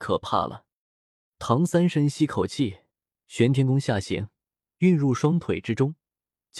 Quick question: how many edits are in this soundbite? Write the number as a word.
zero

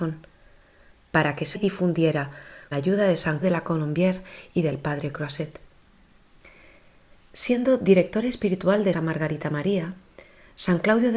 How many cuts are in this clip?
four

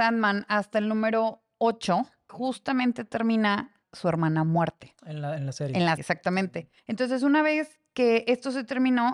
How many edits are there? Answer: five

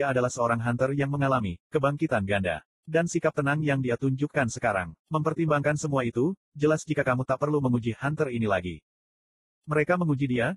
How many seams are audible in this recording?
one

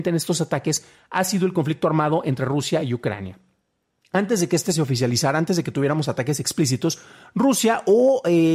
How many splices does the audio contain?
zero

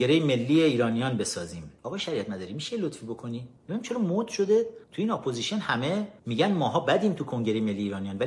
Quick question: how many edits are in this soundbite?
four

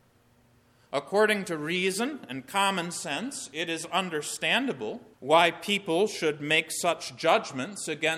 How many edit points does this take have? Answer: one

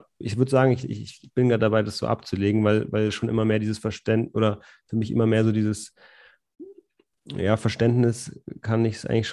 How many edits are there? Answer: zero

